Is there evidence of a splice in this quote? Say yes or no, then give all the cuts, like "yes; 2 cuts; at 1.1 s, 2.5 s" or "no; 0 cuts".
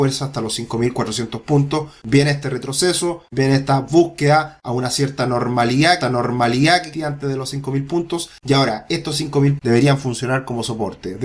yes; 2 cuts; at 6.0 s, 9.6 s